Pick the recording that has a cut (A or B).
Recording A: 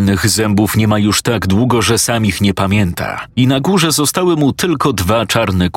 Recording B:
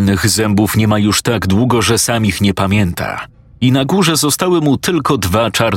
A